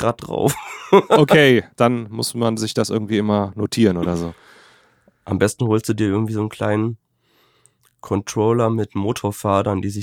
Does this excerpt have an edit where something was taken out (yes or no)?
no